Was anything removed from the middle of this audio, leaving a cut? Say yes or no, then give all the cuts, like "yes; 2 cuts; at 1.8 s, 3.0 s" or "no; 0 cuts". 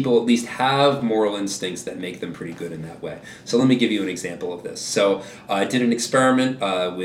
no; 0 cuts